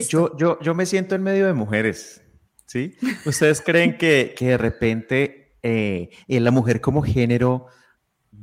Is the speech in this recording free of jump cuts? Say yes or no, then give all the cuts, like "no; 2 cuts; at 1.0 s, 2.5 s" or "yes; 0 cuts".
yes; 0 cuts